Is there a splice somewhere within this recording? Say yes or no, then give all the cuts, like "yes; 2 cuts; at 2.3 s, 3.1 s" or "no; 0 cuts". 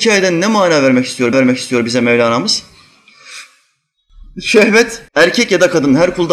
yes; 2 cuts; at 1.3 s, 5.1 s